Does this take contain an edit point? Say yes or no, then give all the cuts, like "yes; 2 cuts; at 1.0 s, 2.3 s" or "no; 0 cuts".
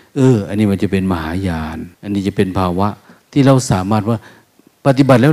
yes; 3 cuts; at 1.9 s, 3.0 s, 4.4 s